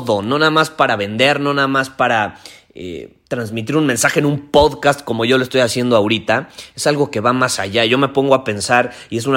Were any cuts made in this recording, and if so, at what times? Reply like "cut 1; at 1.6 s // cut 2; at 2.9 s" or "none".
cut 1; at 3.3 s